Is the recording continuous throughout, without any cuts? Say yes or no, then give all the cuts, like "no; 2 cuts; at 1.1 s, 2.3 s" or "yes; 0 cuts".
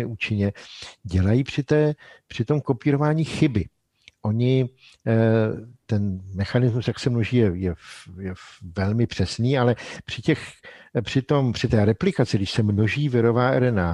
yes; 0 cuts